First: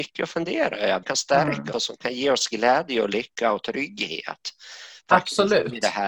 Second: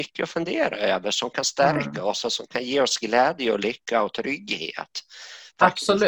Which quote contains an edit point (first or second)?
first